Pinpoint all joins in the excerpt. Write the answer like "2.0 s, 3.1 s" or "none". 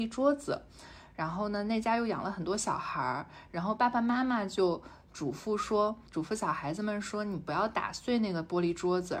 6.1 s